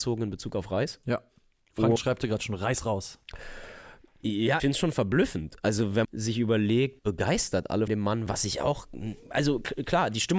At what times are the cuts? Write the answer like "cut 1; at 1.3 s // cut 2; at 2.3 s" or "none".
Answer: cut 1; at 2.0 s // cut 2; at 4.6 s // cut 3; at 6.0 s // cut 4; at 7.0 s // cut 5; at 7.9 s // cut 6; at 8.3 s